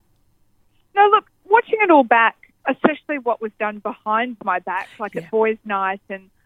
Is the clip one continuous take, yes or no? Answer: no